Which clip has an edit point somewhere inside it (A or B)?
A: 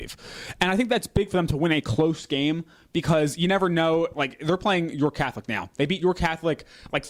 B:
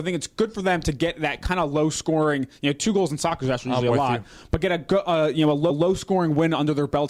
B